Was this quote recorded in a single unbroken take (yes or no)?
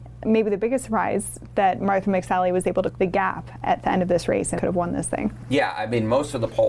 no